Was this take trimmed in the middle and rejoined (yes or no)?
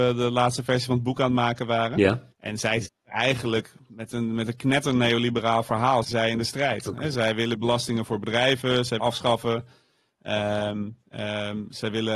yes